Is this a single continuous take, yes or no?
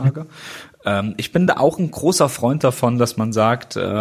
yes